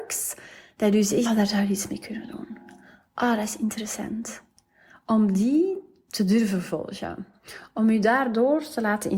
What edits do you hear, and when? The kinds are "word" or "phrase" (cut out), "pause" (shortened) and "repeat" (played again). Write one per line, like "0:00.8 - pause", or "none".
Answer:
0:01.3 - word

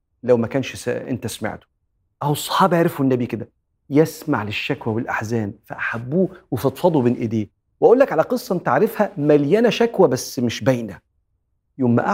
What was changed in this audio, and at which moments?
none

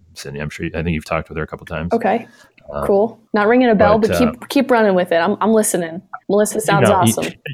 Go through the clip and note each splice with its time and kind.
0:03.3 - pause
0:06.2 - pause

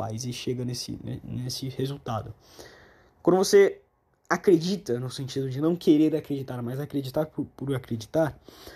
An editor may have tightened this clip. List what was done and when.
none

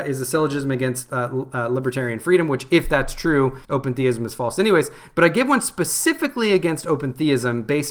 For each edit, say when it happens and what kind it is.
0:03.6 - pause

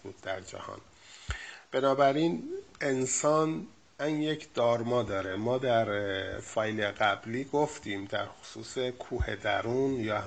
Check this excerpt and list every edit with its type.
0:04.0 - word

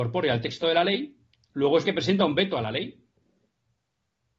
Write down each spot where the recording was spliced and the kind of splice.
0:01.3 - pause
0:01.8 - word

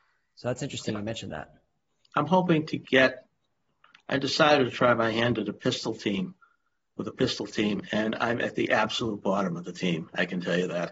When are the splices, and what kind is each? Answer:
none

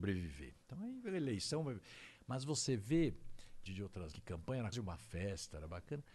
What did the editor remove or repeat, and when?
0:03.7 - word
0:04.1 - word
0:04.7 - word

